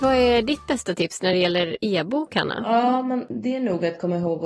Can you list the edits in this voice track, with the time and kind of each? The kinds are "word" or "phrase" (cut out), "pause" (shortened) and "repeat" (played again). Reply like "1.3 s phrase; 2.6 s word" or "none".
none